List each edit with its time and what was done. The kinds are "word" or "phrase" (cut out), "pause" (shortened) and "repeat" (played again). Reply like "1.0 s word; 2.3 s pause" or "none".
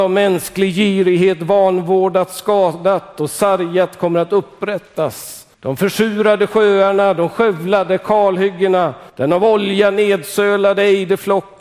5.5 s pause; 9.1 s pause